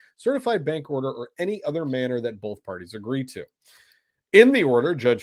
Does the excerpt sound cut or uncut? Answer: uncut